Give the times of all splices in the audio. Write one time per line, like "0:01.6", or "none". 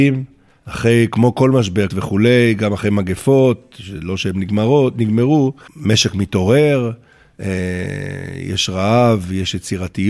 0:01.9